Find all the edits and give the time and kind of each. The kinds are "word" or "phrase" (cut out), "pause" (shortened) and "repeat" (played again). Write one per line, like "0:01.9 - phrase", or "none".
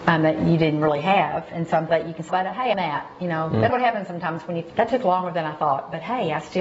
0:01.9 - word
0:02.3 - word
0:02.7 - word
0:03.7 - word
0:04.7 - word